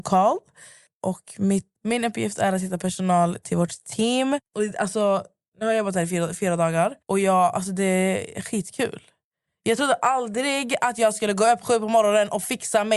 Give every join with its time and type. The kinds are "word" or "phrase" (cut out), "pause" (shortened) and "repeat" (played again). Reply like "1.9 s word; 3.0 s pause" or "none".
1.8 s pause; 7.0 s pause

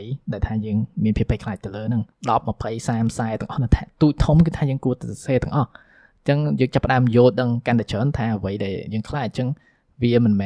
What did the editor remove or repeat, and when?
2.1 s pause

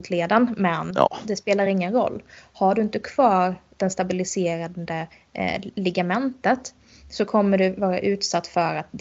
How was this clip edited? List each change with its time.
none

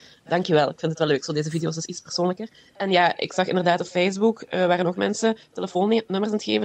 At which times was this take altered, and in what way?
none

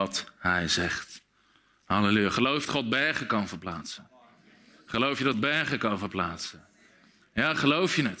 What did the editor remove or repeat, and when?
2.6 s word; 5.3 s word

